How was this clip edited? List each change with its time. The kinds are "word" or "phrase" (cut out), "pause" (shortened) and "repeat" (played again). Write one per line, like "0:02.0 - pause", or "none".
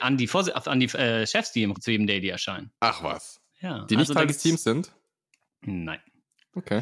0:01.7 - phrase
0:03.5 - pause